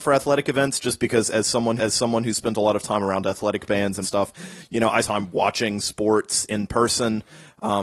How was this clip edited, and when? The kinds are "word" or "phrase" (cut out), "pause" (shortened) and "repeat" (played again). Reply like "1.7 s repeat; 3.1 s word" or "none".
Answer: 1.8 s repeat; 4.0 s phrase; 5.0 s phrase